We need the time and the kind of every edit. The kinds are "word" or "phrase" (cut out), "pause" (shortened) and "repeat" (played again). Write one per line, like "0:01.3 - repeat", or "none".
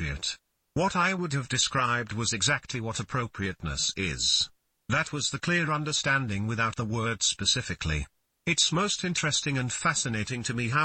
none